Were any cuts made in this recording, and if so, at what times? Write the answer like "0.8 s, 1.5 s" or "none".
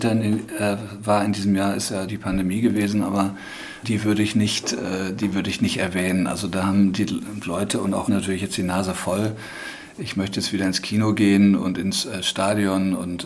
2.1 s, 3.8 s, 8.1 s